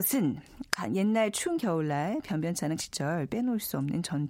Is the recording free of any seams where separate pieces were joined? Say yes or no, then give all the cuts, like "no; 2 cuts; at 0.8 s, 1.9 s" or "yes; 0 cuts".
no; 1 cut; at 2.8 s